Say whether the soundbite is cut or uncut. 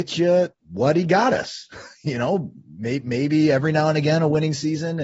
uncut